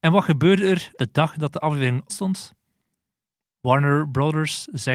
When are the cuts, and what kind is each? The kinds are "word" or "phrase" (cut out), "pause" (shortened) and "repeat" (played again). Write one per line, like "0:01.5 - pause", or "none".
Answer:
0:01.0 - word
0:02.1 - word